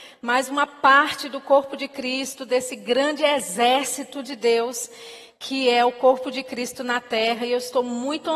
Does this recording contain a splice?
no; 0 cuts

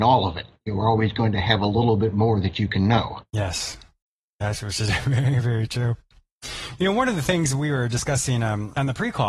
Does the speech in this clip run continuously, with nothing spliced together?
yes; 0 cuts

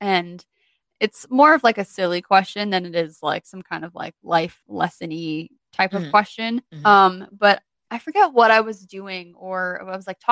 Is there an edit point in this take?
yes; 2 cuts; at 4.6 s, 6.7 s

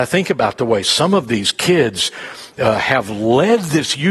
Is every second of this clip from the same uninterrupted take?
yes; 0 cuts

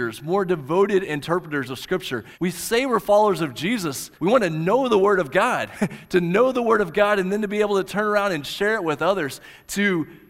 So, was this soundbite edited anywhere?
yes; 2 cuts; at 2.3 s, 4.1 s

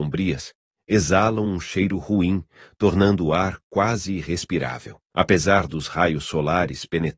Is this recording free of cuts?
no; 1 cut; at 5.1 s

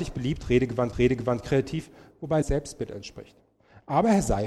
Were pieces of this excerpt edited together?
yes; 2 cuts; at 0.9 s, 2.4 s

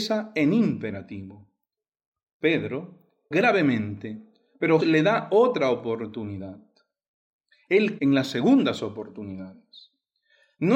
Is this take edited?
yes; 3 cuts; at 3.3 s, 4.8 s, 8.0 s

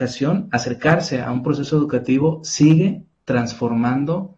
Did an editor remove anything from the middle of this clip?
no; 0 cuts

